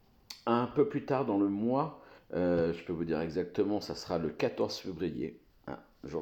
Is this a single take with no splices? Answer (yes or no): no